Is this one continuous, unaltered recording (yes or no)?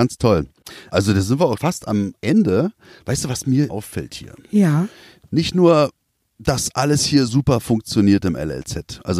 no